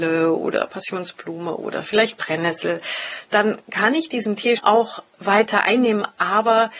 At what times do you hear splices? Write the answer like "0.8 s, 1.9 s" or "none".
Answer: 4.6 s